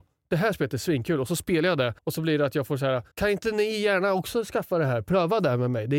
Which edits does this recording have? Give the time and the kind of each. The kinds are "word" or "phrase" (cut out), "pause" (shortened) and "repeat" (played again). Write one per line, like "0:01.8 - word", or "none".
0:02.0 - pause
0:03.1 - pause